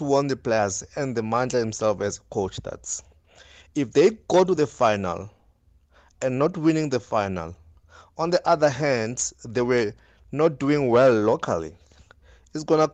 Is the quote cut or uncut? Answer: uncut